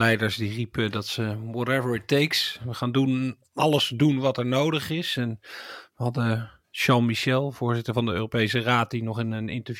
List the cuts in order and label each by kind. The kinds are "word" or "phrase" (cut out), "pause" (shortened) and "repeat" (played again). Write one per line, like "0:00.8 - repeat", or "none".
0:06.6 - pause